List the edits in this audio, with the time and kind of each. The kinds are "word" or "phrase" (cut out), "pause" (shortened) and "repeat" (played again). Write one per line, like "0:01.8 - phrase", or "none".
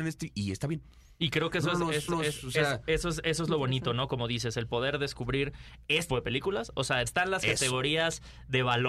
0:02.1 - repeat
0:06.1 - word
0:07.1 - phrase